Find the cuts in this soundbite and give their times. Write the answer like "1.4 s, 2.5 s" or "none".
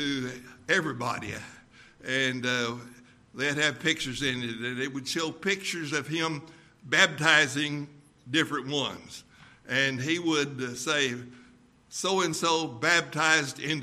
none

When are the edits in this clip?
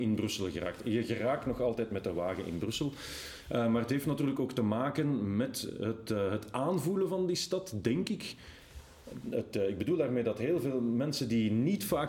none

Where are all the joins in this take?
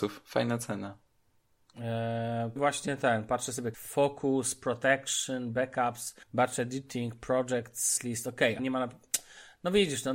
2.6 s, 3.7 s, 6.2 s, 8.0 s, 8.6 s

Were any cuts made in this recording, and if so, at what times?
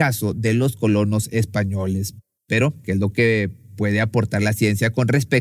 none

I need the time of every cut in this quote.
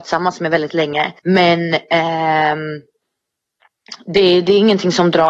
1.2 s

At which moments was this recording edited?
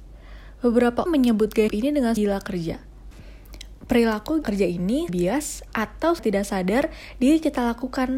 1.1 s, 1.7 s, 2.2 s, 4.4 s, 5.1 s, 6.2 s

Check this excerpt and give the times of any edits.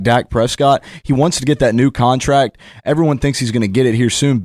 none

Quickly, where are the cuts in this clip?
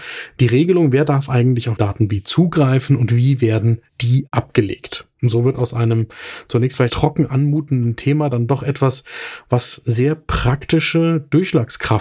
1.8 s, 3.9 s, 6.9 s

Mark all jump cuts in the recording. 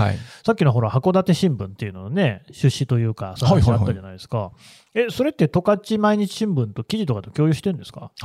none

